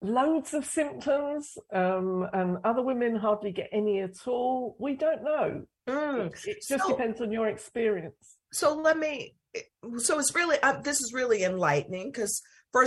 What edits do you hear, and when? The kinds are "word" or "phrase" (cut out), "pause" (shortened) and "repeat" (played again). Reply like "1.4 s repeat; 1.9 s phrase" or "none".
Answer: 5.8 s pause; 8.4 s pause